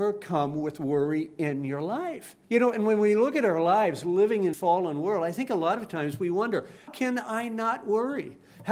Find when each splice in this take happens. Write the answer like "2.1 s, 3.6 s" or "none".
2.4 s, 4.5 s, 6.9 s